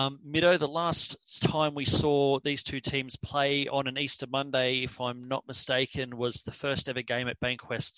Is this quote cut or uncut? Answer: uncut